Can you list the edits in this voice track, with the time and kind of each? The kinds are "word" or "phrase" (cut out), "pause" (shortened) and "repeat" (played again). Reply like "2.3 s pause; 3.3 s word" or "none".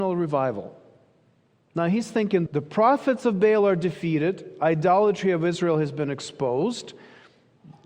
2.5 s word